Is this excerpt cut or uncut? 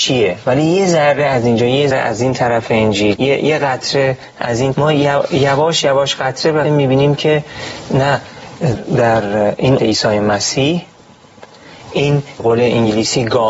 cut